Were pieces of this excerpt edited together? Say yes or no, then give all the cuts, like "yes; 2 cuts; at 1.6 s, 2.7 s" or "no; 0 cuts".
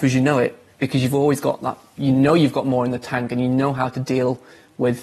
no; 0 cuts